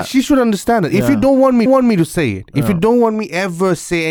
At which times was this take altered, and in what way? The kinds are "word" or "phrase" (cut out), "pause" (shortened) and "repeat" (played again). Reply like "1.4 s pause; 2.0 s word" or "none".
1.7 s repeat